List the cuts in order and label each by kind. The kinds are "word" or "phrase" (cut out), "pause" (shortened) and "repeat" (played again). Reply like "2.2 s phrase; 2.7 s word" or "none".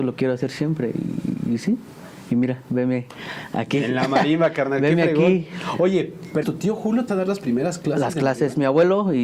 6.4 s word; 7.1 s word